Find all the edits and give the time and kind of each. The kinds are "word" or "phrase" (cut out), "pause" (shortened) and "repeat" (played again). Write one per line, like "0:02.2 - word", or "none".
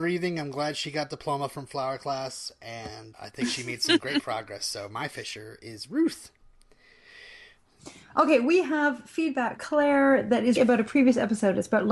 0:03.1 - word
0:09.6 - word
0:10.6 - word